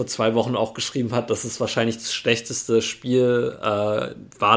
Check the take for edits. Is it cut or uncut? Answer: uncut